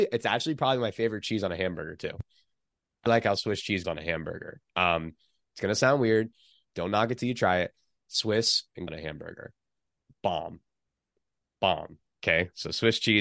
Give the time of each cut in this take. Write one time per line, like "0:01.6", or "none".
0:03.1
0:03.8
0:08.9

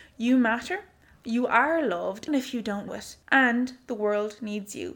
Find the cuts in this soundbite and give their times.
0:02.3
0:02.9
0:03.2

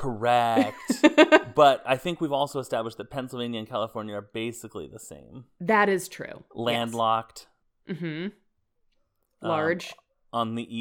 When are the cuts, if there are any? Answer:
0:07.6

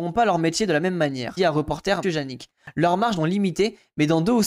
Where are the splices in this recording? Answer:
0:01.4
0:02.0
0:03.2

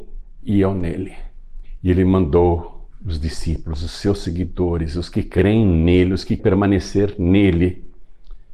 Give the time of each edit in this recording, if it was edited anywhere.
0:06.4

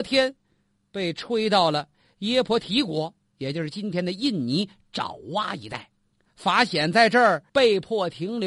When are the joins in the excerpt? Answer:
0:06.1
0:07.5

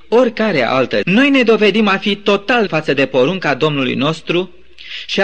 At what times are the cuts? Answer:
0:01.0
0:02.7

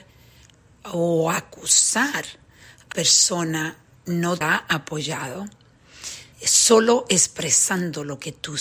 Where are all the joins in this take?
0:02.9
0:04.0
0:04.4
0:06.3

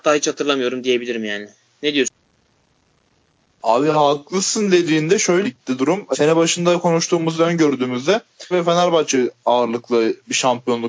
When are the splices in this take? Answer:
0:05.4
0:06.1
0:08.5

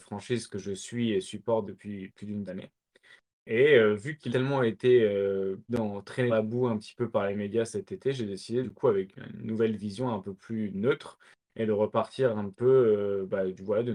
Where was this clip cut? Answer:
0:01.6
0:02.5
0:04.3
0:05.7
0:06.3
0:08.6
0:09.1
0:12.5

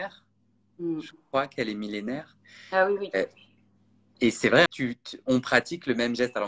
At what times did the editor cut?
0:04.7

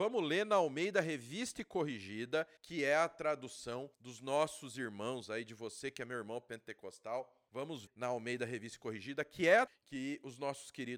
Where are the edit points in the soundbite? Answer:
0:02.6
0:03.9
0:07.9
0:09.7

